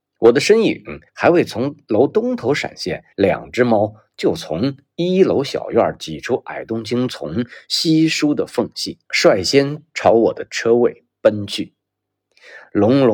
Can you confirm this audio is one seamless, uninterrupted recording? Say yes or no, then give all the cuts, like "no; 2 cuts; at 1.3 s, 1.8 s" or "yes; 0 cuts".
no; 3 cuts; at 1.1 s, 3.1 s, 9.0 s